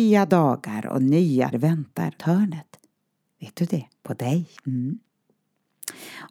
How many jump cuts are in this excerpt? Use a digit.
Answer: 4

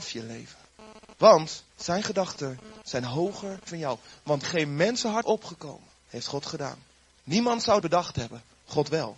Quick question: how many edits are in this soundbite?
6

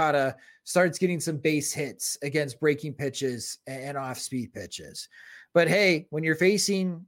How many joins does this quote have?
0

